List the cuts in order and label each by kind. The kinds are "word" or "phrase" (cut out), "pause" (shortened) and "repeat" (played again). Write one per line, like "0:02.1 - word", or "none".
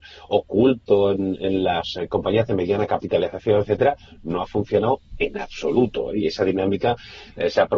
none